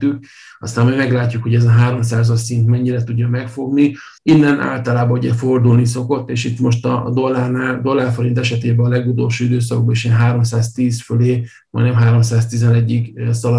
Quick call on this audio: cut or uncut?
cut